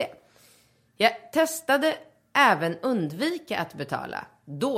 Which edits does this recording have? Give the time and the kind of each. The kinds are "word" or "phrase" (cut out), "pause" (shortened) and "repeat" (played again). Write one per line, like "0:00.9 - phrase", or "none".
none